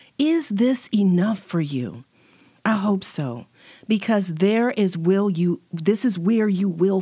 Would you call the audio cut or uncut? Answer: uncut